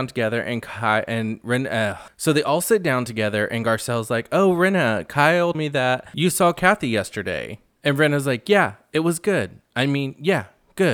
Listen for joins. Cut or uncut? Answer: cut